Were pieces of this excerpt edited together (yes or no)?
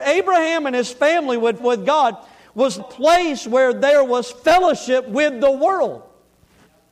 yes